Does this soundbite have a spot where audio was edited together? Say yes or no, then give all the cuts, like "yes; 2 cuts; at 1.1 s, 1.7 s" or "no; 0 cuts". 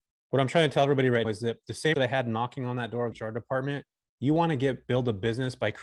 yes; 3 cuts; at 1.2 s, 1.9 s, 3.1 s